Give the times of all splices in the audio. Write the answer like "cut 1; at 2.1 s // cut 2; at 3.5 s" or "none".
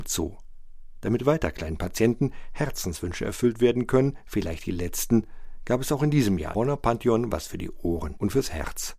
cut 1; at 6.5 s